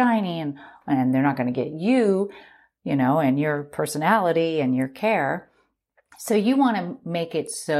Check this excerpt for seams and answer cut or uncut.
uncut